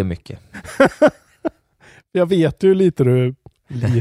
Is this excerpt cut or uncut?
uncut